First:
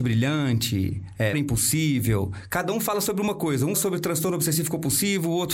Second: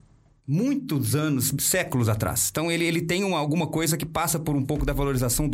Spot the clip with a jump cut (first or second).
first